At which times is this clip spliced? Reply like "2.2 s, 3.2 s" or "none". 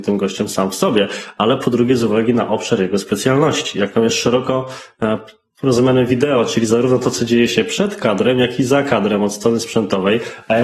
none